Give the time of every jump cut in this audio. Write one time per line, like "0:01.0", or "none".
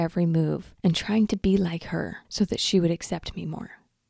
none